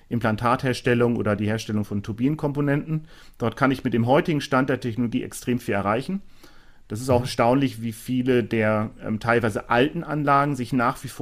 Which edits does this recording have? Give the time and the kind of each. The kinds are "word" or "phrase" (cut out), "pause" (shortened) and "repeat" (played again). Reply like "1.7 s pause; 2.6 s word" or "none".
none